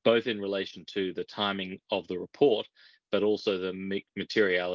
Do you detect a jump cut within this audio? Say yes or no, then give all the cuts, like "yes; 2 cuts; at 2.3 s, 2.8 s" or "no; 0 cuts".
no; 0 cuts